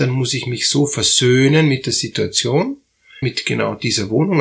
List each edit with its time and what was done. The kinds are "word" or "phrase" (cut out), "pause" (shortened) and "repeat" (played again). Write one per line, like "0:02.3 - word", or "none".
0:03.2 - word